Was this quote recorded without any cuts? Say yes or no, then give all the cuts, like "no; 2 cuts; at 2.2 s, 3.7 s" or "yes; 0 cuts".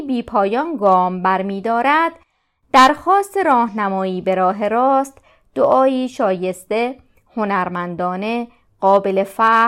yes; 0 cuts